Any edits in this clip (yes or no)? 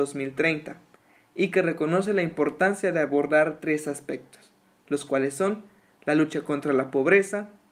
no